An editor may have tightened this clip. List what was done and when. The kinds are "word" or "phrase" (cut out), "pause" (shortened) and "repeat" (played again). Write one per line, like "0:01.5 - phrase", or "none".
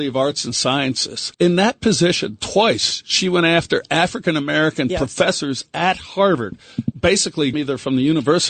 0:01.3 - pause
0:06.9 - word
0:07.5 - phrase